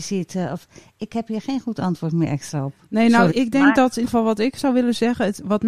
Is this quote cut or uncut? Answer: cut